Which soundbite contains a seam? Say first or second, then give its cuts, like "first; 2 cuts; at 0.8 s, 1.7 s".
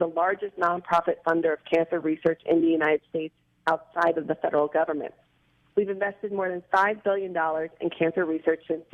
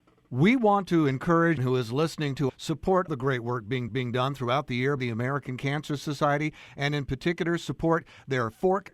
second; 5 cuts; at 1.6 s, 2.5 s, 3.1 s, 3.9 s, 5.0 s